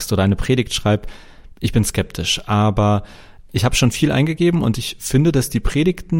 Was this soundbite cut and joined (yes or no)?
no